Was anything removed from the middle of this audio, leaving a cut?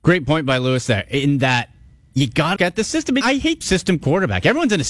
yes; 3 cuts; at 2.6 s, 3.2 s, 3.6 s

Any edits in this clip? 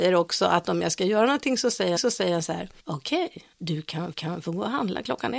yes; 4 cuts; at 2.0 s, 2.8 s, 3.5 s, 4.1 s

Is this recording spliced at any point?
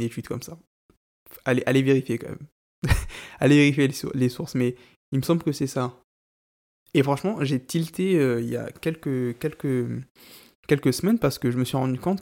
no; 0 cuts

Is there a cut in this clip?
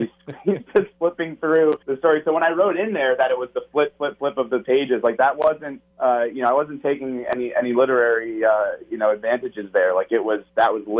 yes; 2 cuts; at 1.8 s, 5.9 s

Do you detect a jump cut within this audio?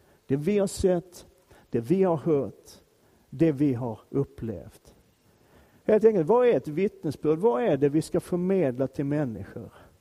yes; 1 cut; at 4.1 s

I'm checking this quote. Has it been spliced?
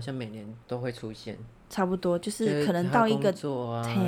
no; 0 cuts

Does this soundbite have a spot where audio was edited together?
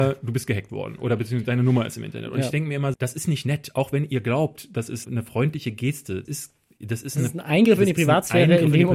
yes; 3 cuts; at 2.9 s, 5.0 s, 6.2 s

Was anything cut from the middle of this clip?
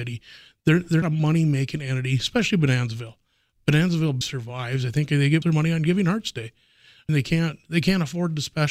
yes; 4 cuts; at 1.0 s, 4.2 s, 5.4 s, 7.1 s

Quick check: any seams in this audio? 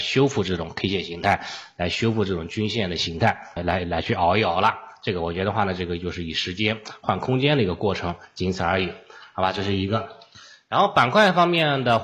yes; 1 cut; at 3.6 s

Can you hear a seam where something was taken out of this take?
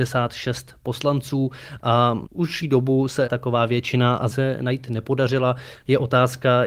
yes; 3 cuts; at 2.6 s, 3.3 s, 4.3 s

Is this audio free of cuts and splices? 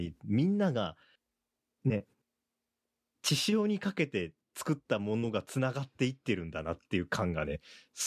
yes; 0 cuts

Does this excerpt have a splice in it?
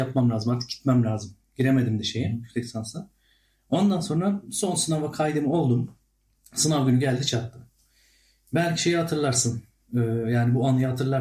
no; 0 cuts

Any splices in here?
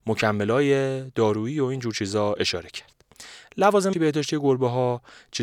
yes; 1 cut; at 3.9 s

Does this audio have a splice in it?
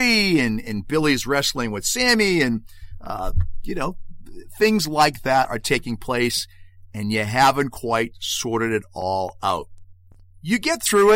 no; 0 cuts

